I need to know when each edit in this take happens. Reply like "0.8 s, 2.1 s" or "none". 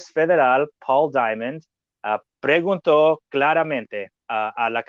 none